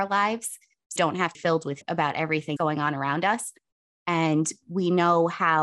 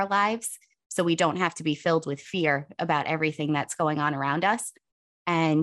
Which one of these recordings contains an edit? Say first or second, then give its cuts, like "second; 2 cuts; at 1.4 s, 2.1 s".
first; 4 cuts; at 1.0 s, 1.3 s, 1.8 s, 2.6 s